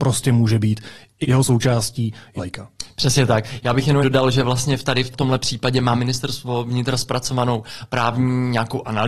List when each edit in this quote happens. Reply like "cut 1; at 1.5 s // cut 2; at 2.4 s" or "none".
cut 1; at 1.2 s // cut 2; at 2.4 s // cut 3; at 4.0 s // cut 4; at 5.1 s